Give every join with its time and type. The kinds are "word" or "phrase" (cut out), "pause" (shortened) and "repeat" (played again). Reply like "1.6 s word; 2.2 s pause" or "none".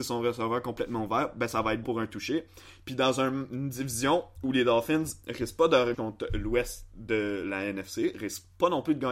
1.8 s word; 5.2 s pause; 5.9 s phrase

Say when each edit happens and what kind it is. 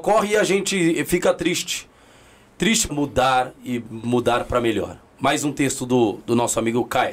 2.9 s phrase

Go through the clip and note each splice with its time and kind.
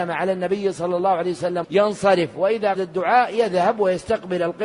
1.6 s word; 2.7 s word

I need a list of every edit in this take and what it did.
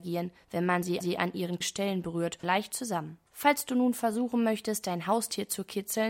1.0 s repeat; 1.6 s word; 2.4 s phrase; 3.3 s pause

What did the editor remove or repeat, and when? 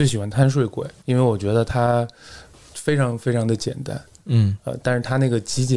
none

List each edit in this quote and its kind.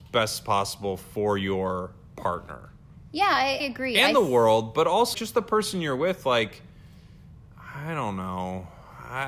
3.6 s word; 5.1 s word

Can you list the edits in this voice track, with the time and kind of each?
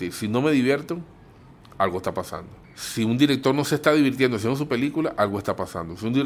none

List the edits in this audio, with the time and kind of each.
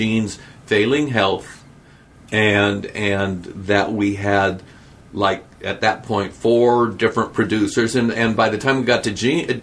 none

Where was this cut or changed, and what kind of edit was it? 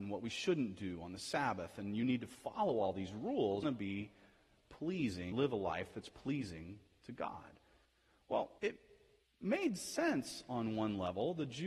3.6 s phrase; 5.3 s word; 8.6 s pause

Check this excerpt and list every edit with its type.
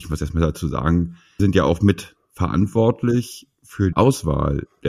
1.4 s word; 3.9 s word

